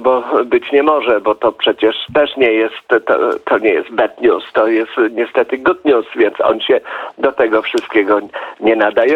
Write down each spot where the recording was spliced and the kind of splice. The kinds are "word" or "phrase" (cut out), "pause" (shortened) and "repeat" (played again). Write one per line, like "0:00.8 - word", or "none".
none